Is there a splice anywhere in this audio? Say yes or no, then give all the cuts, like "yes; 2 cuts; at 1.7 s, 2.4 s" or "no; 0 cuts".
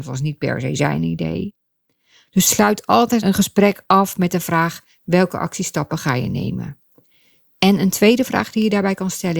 no; 0 cuts